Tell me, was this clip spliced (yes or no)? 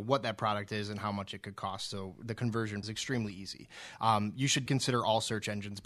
yes